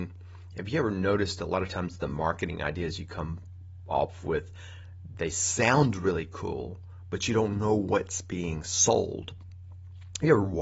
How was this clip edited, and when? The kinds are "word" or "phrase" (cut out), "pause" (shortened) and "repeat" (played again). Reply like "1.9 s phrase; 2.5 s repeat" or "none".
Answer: none